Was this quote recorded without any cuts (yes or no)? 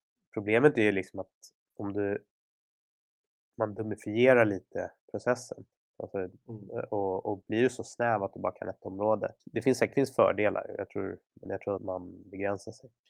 no